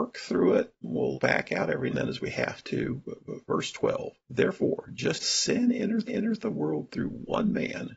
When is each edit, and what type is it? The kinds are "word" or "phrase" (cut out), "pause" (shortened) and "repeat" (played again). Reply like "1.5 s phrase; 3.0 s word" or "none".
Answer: 1.1 s word; 1.9 s word; 4.2 s pause; 5.2 s word; 6.1 s repeat